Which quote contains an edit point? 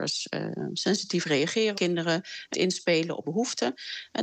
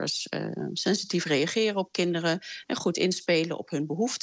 first; 3 cuts; at 1.7 s, 2.5 s, 3.2 s

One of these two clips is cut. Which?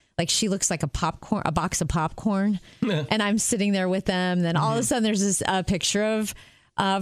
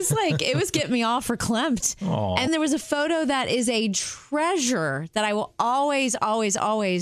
second; 1 cut; at 2.5 s

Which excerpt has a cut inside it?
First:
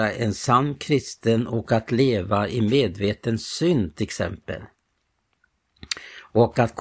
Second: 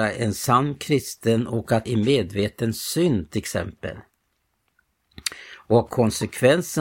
second; 2 cuts; at 1.8 s, 5.9 s

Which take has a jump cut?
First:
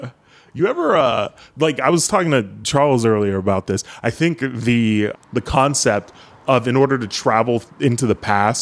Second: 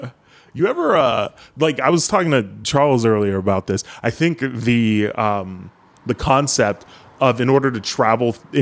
first; 1 cut; at 5.1 s

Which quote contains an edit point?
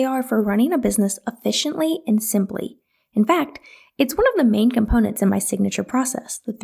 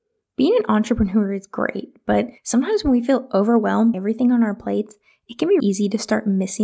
second; 3 cuts; at 2.4 s, 3.9 s, 5.6 s

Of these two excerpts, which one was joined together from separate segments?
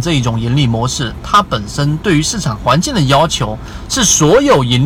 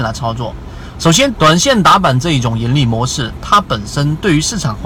second; 1 cut; at 1.3 s

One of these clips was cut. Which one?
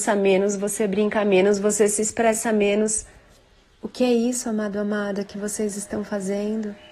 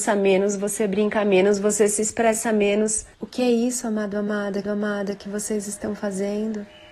second; 2 cuts; at 3.1 s, 4.6 s

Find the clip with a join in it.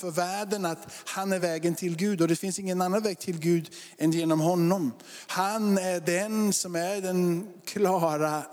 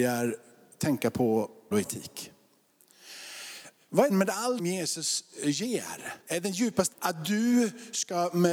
second; 5 cuts; at 1.7 s, 4.1 s, 4.6 s, 6.2 s, 6.9 s

